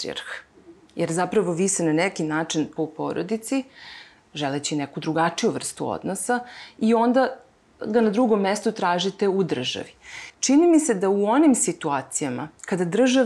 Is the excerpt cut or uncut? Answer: cut